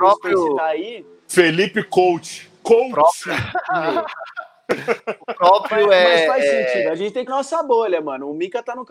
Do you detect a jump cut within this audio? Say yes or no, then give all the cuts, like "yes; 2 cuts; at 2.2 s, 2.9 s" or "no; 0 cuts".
yes; 3 cuts; at 1.2 s, 2.6 s, 7.3 s